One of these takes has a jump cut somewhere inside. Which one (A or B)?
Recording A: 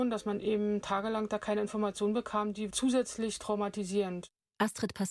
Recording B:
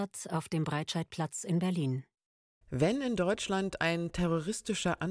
A